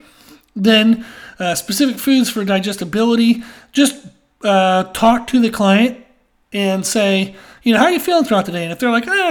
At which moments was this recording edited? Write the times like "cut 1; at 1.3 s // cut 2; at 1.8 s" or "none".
none